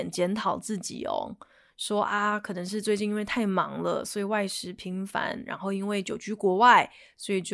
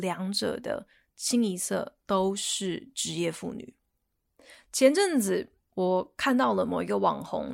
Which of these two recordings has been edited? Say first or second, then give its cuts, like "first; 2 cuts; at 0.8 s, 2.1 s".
second; 1 cut; at 5.6 s